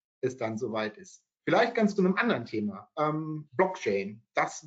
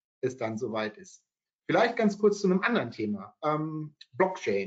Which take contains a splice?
first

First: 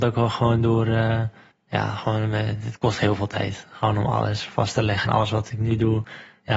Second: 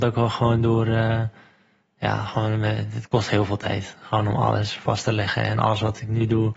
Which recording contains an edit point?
first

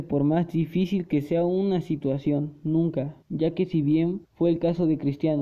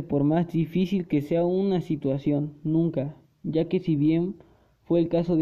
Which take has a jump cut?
first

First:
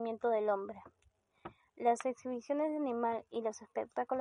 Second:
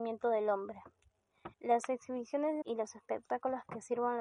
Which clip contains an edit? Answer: second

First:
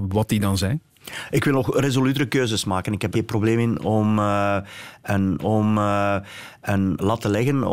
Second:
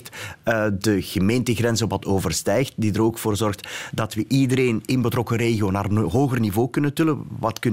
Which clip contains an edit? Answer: first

